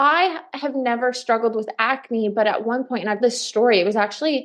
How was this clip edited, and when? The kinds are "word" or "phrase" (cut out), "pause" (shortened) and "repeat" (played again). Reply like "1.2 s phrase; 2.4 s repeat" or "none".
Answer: 3.2 s word

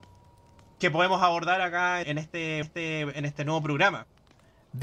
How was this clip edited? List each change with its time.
2.0 s word; 2.6 s repeat

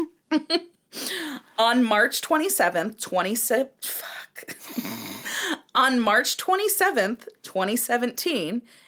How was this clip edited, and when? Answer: 3.8 s pause

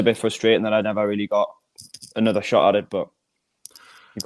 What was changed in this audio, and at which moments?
none

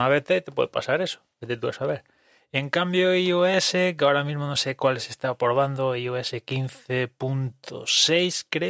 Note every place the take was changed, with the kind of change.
none

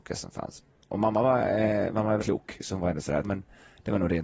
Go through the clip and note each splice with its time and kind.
2.2 s word; 3.2 s word

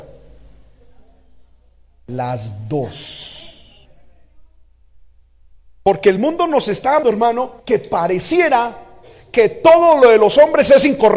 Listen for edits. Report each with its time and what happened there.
7.0 s word; 7.6 s pause

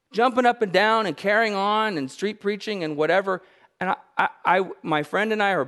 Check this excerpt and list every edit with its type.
none

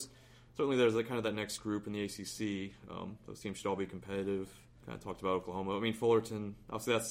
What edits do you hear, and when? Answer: none

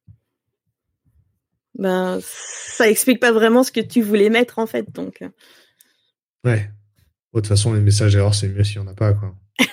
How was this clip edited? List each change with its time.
none

